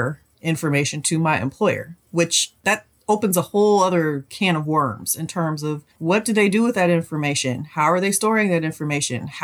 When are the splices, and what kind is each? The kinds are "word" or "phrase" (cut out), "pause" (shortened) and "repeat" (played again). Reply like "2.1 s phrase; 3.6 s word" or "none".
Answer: 2.0 s pause; 5.9 s pause